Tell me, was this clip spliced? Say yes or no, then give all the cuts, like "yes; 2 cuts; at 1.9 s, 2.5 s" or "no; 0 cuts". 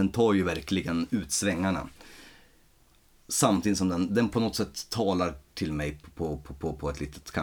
no; 0 cuts